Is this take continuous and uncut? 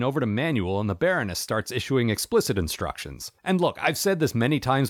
yes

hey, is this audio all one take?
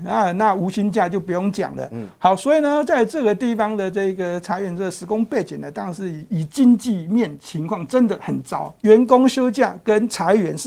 yes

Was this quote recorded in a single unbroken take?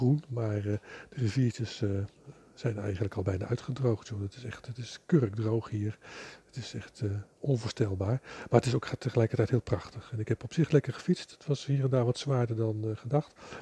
yes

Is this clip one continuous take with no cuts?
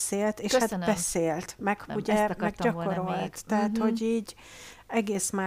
no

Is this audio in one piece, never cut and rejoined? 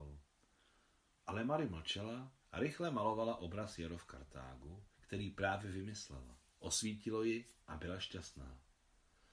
no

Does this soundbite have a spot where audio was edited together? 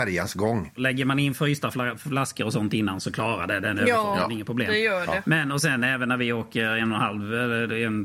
no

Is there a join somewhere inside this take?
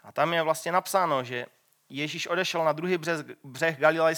no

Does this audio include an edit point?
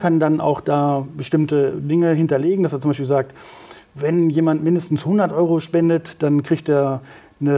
no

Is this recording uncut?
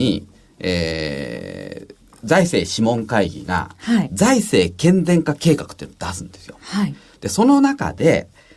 yes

